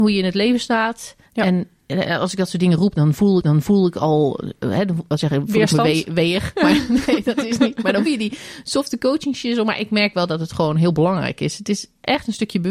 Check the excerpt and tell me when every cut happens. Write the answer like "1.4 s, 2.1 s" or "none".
1.2 s, 3.4 s, 5.1 s, 8.1 s